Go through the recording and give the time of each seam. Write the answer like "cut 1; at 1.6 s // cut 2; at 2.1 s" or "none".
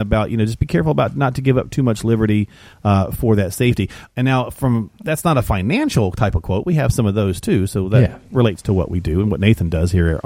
none